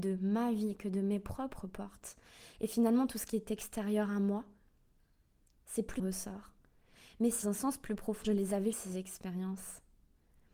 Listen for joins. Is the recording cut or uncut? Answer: cut